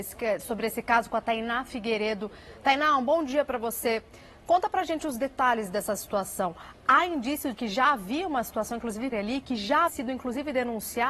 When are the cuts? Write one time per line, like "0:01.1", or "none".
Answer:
0:07.5
0:09.1
0:09.9

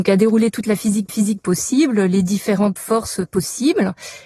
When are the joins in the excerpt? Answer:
0:01.1
0:02.8

